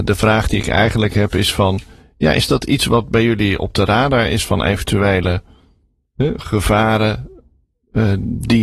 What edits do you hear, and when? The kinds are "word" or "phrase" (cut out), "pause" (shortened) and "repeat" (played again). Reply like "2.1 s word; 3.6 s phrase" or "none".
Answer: none